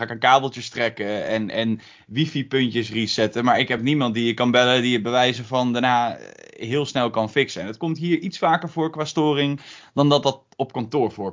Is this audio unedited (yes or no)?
yes